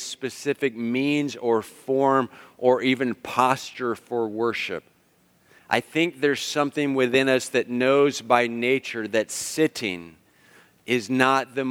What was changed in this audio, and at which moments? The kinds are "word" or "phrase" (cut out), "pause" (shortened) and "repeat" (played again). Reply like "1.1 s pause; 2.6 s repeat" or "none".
none